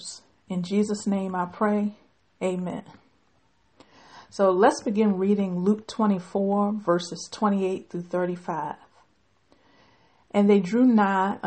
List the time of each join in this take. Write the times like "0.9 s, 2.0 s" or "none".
none